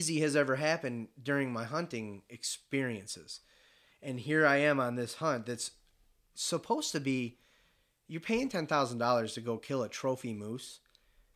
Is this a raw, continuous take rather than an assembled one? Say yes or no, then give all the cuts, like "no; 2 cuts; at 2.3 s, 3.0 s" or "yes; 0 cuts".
yes; 0 cuts